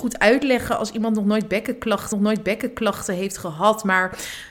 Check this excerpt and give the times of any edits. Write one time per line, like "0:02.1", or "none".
0:02.1